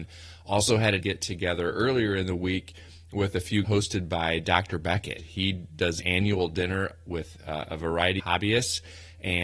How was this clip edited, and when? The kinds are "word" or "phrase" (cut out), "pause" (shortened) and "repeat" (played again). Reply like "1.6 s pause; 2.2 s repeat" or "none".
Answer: 1.0 s phrase; 3.6 s word; 5.2 s word; 6.0 s word; 8.2 s word